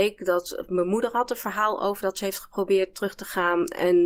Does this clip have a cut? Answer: no; 0 cuts

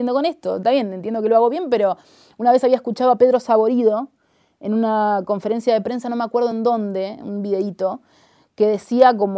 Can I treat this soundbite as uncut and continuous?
yes; 0 cuts

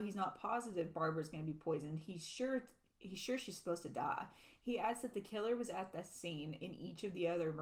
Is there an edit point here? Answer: no; 0 cuts

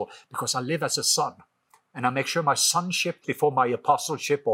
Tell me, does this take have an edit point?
yes; 1 cut; at 3.2 s

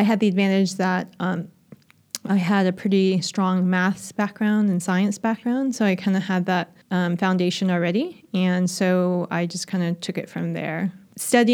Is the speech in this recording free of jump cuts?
no; 1 cut; at 6.8 s

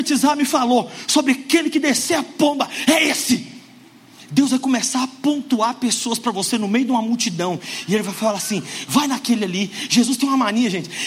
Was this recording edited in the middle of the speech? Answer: no; 0 cuts

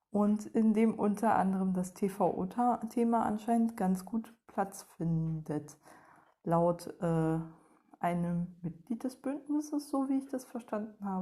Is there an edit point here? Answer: no; 0 cuts

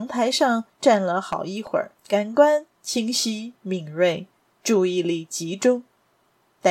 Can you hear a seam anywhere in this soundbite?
no; 0 cuts

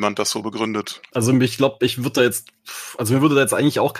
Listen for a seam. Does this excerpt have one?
no; 0 cuts

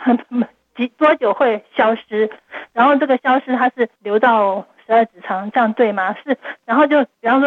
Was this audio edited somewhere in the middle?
yes; 1 cut; at 4.0 s

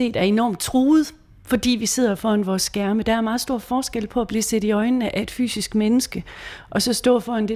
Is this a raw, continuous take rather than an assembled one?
yes; 0 cuts

